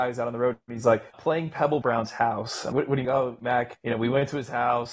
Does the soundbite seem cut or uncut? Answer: cut